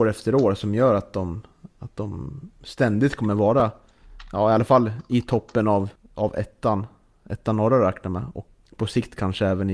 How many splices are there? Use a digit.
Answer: 2